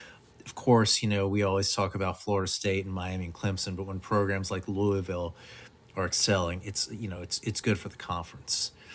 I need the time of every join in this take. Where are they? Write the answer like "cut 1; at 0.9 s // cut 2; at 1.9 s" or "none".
none